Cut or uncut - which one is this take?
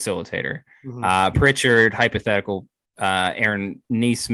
cut